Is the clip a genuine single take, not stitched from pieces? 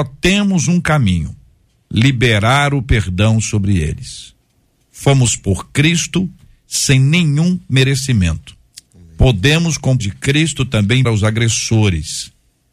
no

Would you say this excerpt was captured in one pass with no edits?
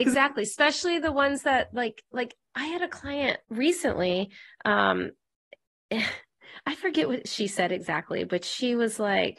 no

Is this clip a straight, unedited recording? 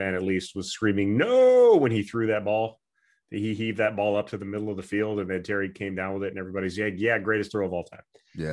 yes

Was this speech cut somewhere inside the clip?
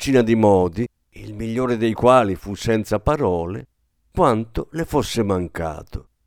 no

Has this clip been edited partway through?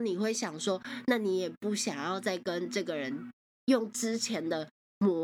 no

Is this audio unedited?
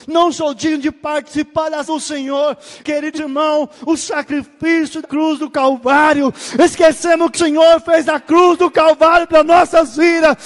no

